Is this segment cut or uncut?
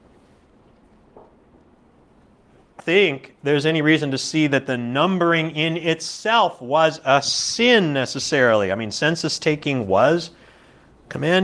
cut